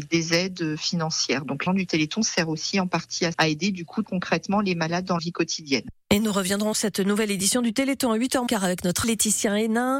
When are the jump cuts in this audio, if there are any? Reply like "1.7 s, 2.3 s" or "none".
1.7 s, 3.3 s, 4.0 s, 5.2 s, 6.7 s, 8.5 s, 9.0 s